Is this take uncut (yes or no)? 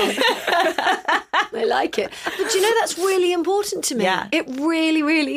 yes